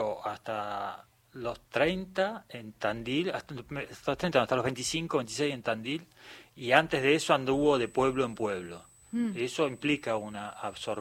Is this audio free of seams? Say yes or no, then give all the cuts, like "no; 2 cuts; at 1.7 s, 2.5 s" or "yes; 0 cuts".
no; 1 cut; at 1.7 s